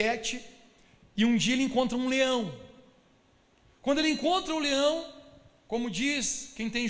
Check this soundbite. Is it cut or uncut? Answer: uncut